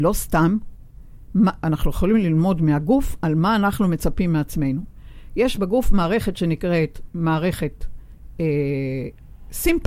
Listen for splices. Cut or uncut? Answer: uncut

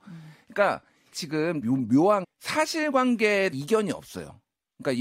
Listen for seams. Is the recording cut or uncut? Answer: cut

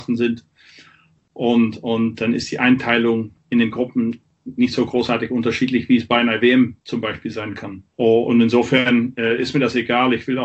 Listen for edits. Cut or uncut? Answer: cut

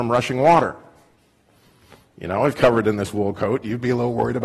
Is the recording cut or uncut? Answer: cut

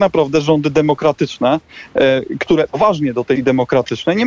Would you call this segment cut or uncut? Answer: cut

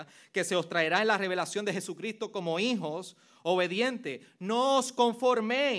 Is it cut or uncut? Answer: uncut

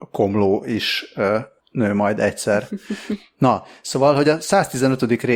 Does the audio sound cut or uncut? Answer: uncut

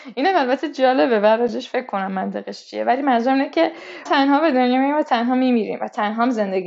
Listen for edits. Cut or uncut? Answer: cut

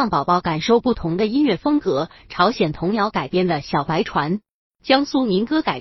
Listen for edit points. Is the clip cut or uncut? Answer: uncut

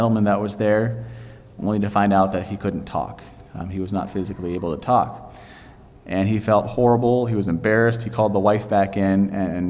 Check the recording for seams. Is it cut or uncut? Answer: uncut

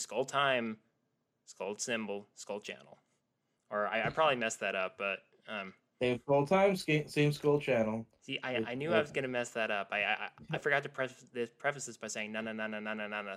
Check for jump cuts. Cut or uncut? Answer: uncut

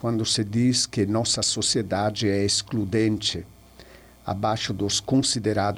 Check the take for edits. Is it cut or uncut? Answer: uncut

